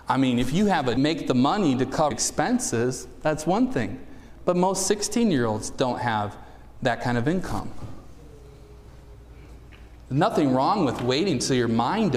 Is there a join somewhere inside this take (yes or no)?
yes